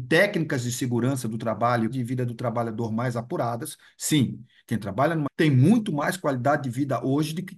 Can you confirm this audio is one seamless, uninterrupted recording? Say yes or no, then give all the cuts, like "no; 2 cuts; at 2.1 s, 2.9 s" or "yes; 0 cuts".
no; 2 cuts; at 1.9 s, 5.3 s